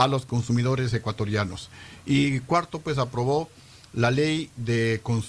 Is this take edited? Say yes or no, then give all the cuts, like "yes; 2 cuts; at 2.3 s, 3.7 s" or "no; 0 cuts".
no; 0 cuts